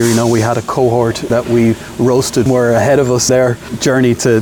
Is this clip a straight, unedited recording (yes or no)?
no